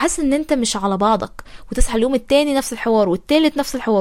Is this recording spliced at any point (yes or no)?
no